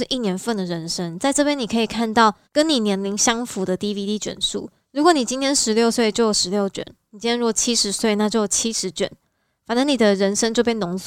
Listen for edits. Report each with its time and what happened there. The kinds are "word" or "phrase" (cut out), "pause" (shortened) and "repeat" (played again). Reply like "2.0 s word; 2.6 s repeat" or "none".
none